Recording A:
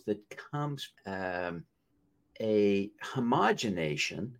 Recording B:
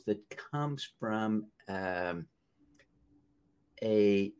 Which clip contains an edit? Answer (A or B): A